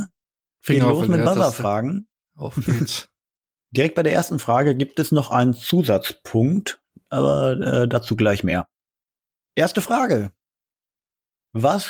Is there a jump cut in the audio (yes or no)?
no